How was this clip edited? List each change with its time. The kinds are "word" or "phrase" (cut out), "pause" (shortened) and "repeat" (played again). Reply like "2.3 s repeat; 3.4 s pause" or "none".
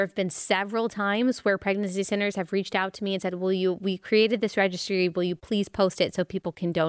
none